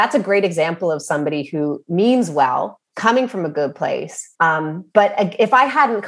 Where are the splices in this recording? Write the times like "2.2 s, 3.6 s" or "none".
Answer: 2.9 s, 4.3 s